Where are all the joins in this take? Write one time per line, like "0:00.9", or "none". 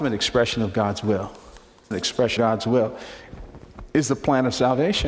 0:01.9
0:02.4